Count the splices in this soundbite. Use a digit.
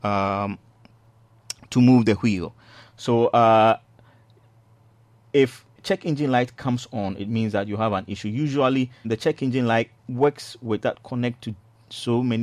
3